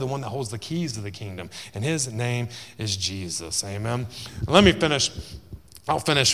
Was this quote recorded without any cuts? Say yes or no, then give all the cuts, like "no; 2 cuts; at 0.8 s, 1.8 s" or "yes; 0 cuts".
yes; 0 cuts